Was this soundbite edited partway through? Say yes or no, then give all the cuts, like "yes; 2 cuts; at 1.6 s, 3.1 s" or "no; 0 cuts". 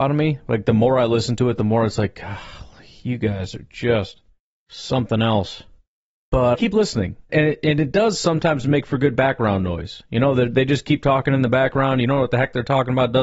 yes; 2 cuts; at 6.5 s, 7.3 s